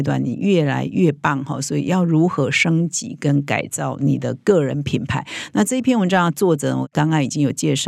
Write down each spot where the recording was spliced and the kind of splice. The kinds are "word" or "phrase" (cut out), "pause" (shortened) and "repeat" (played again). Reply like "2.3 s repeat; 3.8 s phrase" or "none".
none